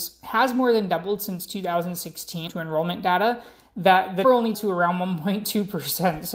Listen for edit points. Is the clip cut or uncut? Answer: cut